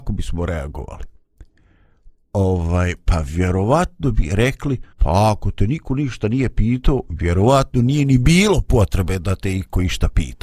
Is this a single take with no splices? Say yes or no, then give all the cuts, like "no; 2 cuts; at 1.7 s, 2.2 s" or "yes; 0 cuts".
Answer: no; 1 cut; at 4.9 s